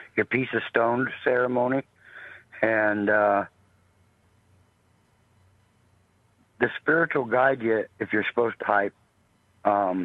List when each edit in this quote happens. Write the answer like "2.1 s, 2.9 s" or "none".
7.9 s, 8.6 s